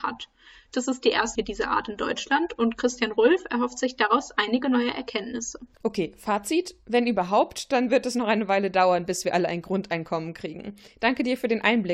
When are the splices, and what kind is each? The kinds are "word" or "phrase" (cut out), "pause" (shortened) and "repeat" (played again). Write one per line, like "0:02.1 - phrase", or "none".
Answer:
0:01.4 - word